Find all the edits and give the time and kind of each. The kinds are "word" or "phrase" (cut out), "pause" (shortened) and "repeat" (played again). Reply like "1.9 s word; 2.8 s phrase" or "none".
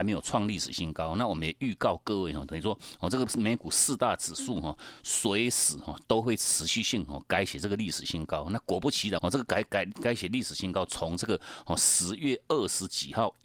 9.2 s phrase